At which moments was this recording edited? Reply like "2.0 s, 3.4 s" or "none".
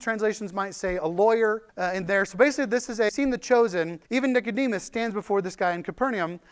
1.7 s, 3.1 s, 4.0 s